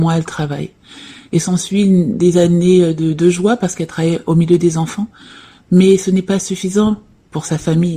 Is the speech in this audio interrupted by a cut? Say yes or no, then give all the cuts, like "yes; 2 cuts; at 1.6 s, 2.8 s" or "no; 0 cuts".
no; 0 cuts